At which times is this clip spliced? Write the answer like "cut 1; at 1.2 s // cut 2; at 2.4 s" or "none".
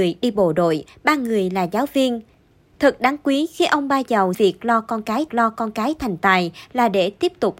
cut 1; at 4.3 s // cut 2; at 5.3 s